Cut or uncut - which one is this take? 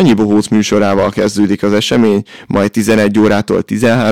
uncut